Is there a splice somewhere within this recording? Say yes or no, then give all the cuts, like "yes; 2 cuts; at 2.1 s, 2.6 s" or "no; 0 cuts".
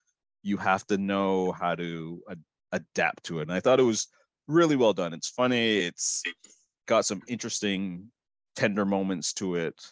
no; 0 cuts